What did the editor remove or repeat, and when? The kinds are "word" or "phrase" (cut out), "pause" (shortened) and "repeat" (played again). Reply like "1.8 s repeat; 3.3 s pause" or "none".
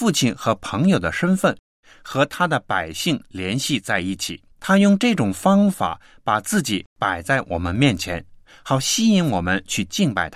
4.5 s pause